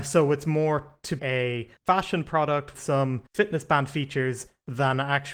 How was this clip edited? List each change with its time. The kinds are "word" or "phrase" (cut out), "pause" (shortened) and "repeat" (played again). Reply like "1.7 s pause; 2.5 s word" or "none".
1.2 s word; 1.8 s pause; 2.7 s word; 3.3 s pause